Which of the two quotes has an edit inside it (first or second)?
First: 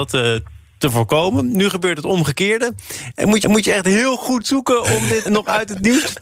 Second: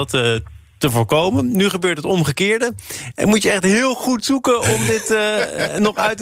first